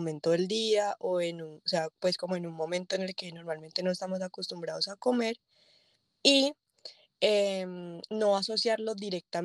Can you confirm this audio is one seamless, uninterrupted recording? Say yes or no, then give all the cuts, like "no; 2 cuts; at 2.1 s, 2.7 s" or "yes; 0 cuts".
yes; 0 cuts